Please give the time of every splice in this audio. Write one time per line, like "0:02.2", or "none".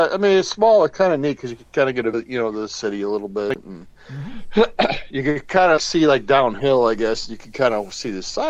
0:02.1
0:05.8